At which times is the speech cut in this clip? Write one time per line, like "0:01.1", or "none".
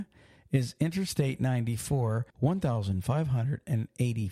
0:02.3